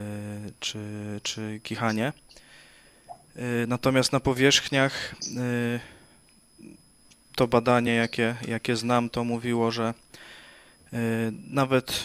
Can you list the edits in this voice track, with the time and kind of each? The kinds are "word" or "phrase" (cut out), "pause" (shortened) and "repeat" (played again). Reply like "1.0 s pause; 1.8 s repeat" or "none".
none